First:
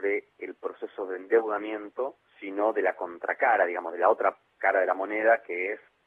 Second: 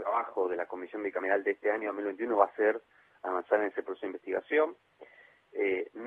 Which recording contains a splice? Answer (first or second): first